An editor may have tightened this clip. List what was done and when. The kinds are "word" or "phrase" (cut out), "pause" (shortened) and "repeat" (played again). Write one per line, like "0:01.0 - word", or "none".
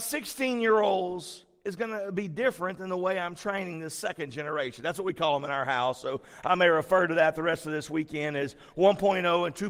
none